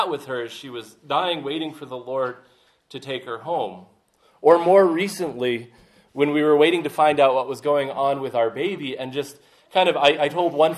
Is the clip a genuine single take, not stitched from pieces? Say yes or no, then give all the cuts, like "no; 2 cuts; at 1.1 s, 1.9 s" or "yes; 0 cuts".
yes; 0 cuts